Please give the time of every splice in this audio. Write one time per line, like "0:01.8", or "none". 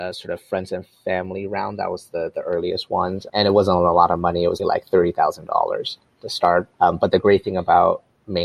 0:03.3
0:04.6
0:06.7